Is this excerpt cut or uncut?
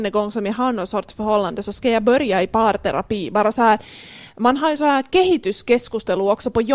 uncut